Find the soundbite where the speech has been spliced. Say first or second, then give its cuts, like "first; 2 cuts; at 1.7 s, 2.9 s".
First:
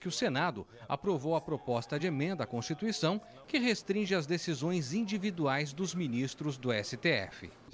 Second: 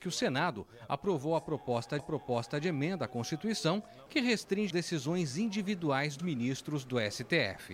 second; 3 cuts; at 2.0 s, 4.7 s, 6.2 s